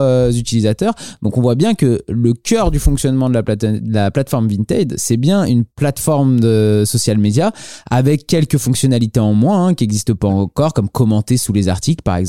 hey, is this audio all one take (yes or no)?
yes